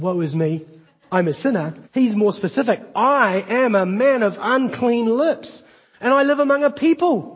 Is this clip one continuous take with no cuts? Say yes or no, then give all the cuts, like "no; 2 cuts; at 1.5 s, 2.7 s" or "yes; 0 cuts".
no; 1 cut; at 1.8 s